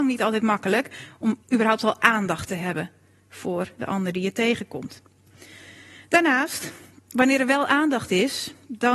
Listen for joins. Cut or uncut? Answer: cut